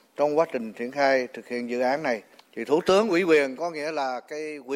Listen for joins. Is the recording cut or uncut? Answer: uncut